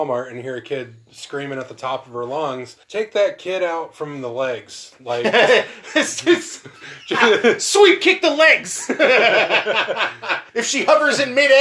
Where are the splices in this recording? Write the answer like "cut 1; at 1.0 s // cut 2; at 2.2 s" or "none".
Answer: cut 1; at 2.8 s // cut 2; at 10.5 s